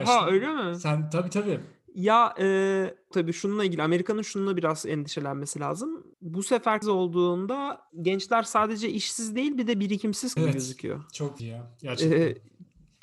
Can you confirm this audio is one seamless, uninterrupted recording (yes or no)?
no